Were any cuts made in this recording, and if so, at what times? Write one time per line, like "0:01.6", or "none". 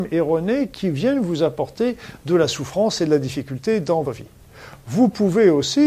0:04.0

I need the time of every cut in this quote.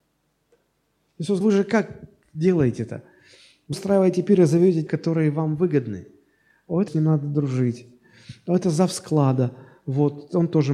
0:01.4
0:03.7
0:04.9
0:06.9

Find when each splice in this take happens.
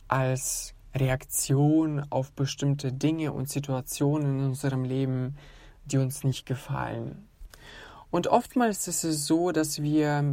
none

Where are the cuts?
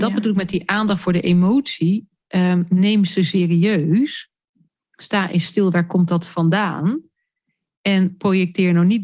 none

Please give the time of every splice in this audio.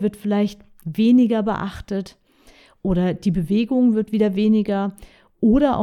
none

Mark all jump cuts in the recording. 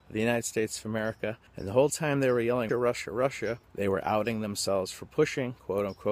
0:01.5
0:02.7
0:03.6

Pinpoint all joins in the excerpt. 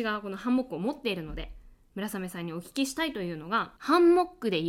0:03.8

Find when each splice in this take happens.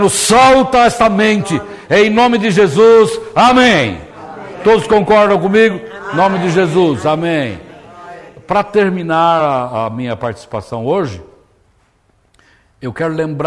none

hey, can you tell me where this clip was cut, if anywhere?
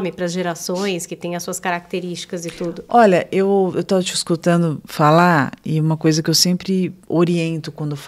none

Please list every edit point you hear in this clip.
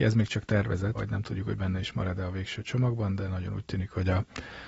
0:00.9

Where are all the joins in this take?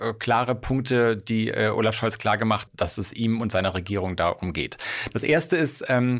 0:02.7

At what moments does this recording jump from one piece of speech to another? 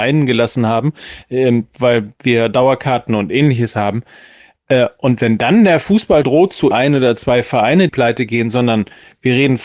0:06.2
0:06.7
0:07.9

